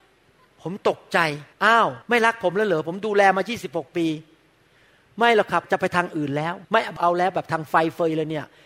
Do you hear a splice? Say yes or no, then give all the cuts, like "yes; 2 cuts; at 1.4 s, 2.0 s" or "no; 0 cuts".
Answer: yes; 3 cuts; at 1.5 s, 2.0 s, 6.6 s